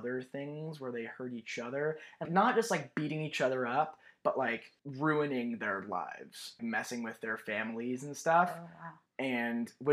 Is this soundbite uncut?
no; 3 cuts; at 2.2 s, 4.8 s, 6.6 s

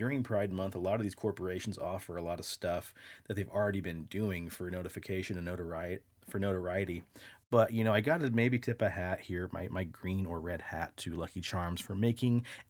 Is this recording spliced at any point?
no; 0 cuts

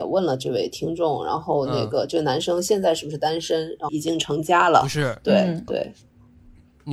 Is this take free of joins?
no; 2 cuts; at 3.9 s, 5.7 s

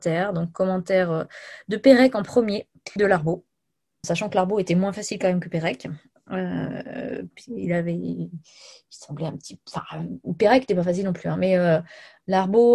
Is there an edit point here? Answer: yes; 2 cuts; at 3.0 s, 4.0 s

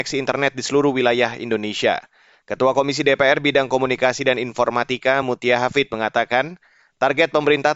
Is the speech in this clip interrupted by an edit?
no; 0 cuts

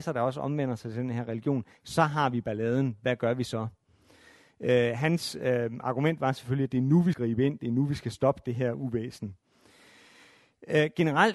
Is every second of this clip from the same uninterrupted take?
no; 1 cut; at 7.1 s

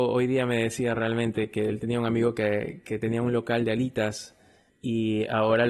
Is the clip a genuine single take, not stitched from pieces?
yes; 0 cuts

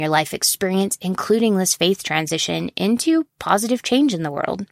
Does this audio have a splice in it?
no; 0 cuts

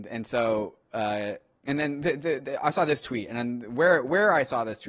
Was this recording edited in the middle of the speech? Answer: no; 0 cuts

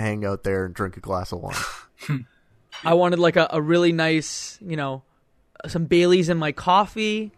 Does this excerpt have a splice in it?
no; 0 cuts

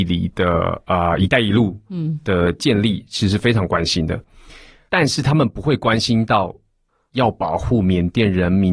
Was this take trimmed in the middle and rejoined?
no; 0 cuts

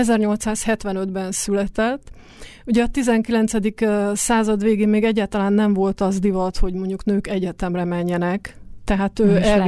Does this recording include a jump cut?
no; 0 cuts

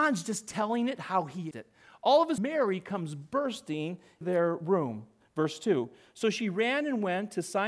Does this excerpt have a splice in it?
yes; 3 cuts; at 1.5 s, 2.4 s, 4.2 s

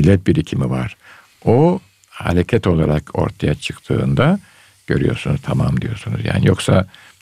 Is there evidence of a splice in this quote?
no; 0 cuts

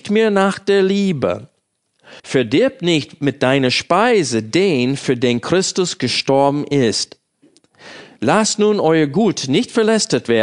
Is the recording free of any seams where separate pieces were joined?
no; 1 cut; at 2.2 s

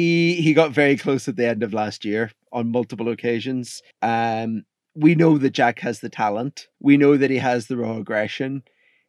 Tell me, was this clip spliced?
yes; 2 cuts; at 3.9 s, 6.7 s

